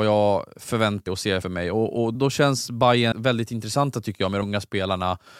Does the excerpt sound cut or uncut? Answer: cut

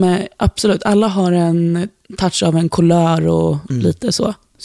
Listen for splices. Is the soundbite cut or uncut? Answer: uncut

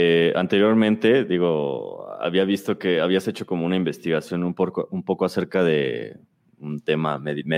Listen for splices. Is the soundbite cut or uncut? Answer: uncut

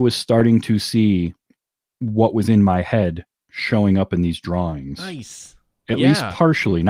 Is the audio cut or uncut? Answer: cut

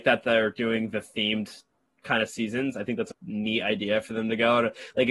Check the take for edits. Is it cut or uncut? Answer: cut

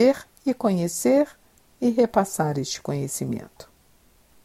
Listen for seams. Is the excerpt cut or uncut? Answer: uncut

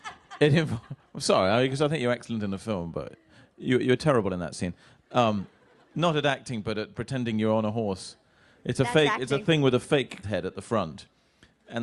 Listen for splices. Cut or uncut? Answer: cut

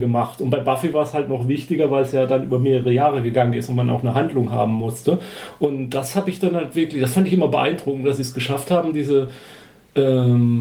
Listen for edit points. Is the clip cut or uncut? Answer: uncut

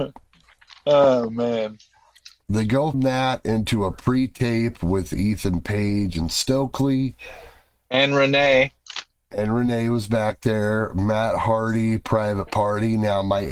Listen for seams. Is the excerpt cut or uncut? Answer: cut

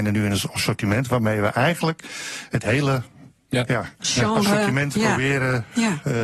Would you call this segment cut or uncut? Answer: uncut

